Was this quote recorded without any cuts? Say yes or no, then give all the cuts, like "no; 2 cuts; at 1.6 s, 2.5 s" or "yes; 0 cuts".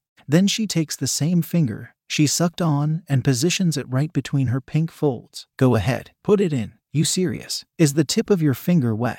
no; 4 cuts; at 5.5 s, 6.2 s, 6.8 s, 7.7 s